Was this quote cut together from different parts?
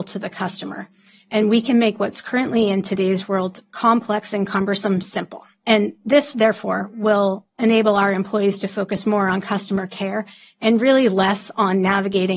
no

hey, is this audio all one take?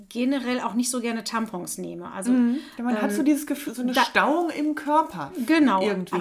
no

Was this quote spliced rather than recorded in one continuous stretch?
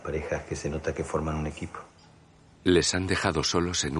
no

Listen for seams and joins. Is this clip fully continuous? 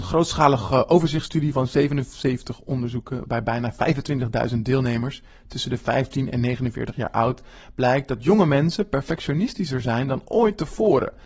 yes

